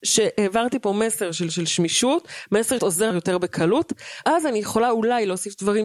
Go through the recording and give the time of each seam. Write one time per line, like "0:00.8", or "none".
0:01.5
0:02.8
0:03.1
0:04.2